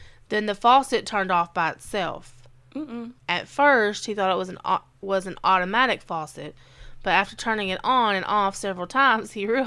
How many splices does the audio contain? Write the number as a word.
one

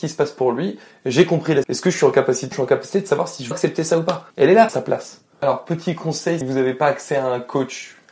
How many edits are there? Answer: seven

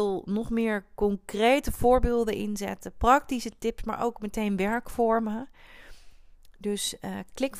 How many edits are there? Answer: zero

